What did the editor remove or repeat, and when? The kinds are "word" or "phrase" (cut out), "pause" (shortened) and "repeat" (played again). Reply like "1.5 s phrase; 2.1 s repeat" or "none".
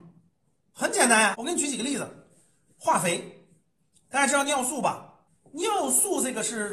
1.3 s word